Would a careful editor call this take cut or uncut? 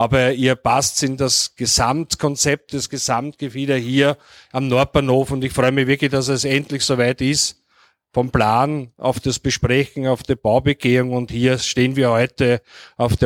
uncut